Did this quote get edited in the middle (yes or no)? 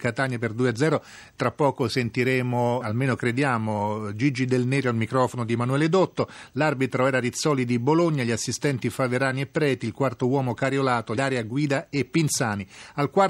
yes